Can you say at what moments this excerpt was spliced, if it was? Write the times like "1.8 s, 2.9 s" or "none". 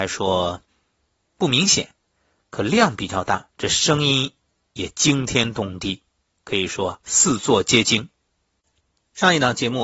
1.3 s, 3.5 s